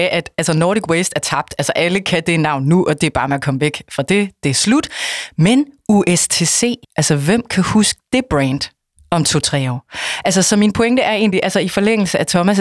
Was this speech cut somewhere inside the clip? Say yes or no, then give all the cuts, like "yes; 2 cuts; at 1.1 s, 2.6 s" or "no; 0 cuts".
yes; 1 cut; at 6.8 s